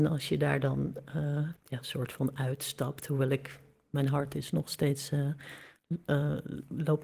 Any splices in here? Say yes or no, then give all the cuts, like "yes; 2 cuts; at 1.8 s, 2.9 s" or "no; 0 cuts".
yes; 1 cut; at 1.6 s